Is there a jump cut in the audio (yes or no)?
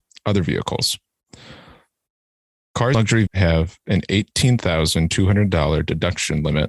yes